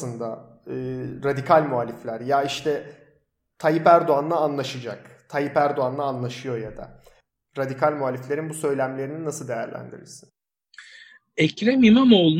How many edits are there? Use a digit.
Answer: 0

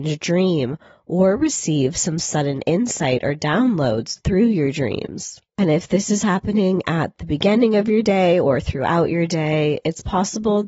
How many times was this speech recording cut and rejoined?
1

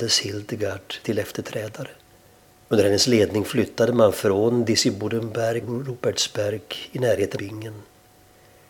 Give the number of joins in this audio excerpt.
3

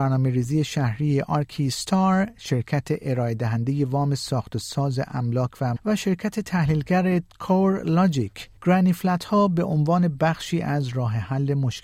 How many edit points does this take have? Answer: 2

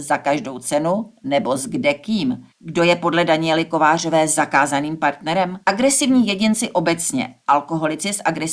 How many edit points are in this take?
2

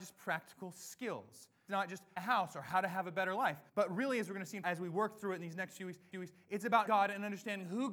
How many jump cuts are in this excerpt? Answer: 6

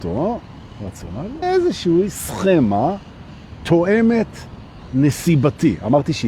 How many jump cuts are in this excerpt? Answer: 3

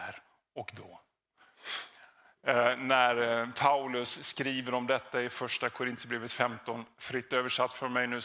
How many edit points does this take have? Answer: 0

